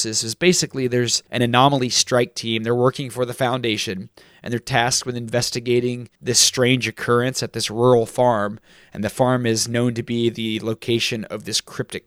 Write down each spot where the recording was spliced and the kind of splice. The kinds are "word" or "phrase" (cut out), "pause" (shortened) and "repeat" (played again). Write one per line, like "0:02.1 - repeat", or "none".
0:01.3 - pause
0:06.2 - pause